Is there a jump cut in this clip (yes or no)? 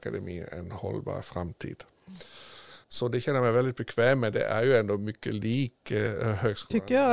yes